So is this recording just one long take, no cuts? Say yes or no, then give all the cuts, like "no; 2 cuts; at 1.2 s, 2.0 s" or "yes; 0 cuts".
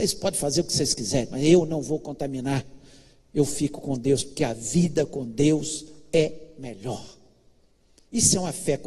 yes; 0 cuts